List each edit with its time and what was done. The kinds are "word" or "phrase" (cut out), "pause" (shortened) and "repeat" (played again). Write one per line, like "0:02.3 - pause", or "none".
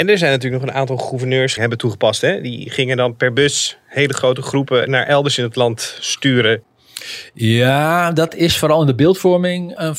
0:01.6 - phrase